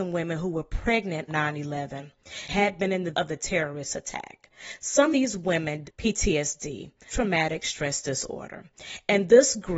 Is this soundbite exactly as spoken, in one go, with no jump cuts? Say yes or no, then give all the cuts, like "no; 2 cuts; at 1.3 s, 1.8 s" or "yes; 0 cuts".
no; 6 cuts; at 1.3 s, 2.5 s, 3.1 s, 5.1 s, 5.8 s, 7.1 s